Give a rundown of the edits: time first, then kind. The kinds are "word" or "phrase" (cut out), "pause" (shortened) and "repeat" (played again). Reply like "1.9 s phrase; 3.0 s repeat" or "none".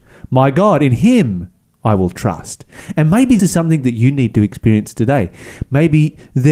3.4 s word